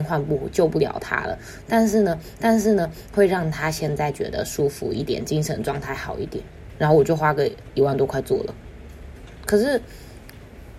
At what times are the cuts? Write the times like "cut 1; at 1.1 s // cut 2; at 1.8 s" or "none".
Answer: cut 1; at 2.4 s